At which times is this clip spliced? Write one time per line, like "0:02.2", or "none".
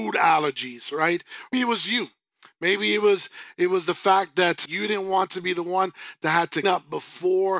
0:01.5
0:04.6
0:06.6